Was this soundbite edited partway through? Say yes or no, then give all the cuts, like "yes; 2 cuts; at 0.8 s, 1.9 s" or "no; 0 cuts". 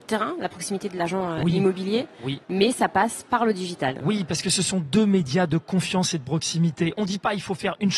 yes; 1 cut; at 2.4 s